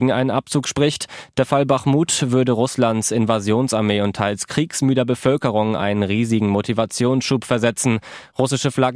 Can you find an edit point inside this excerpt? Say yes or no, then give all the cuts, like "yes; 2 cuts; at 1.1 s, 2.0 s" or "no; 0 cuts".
no; 0 cuts